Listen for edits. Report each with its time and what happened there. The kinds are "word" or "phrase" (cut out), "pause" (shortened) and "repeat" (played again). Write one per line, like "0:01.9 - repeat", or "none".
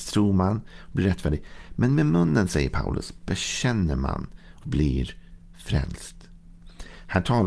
0:04.6 - word